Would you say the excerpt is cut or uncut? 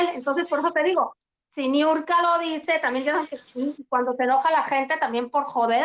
uncut